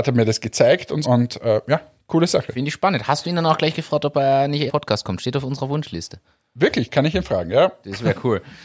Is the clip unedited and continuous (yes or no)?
no